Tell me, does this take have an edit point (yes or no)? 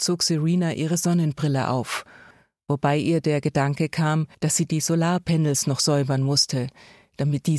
yes